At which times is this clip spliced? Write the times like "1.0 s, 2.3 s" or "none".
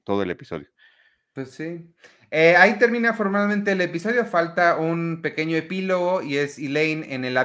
none